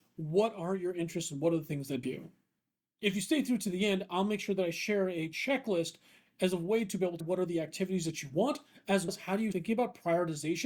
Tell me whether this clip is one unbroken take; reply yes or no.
no